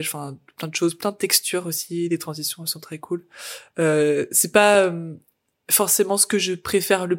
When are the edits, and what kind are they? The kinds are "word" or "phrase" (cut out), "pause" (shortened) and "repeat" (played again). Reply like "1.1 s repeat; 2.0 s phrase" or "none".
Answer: none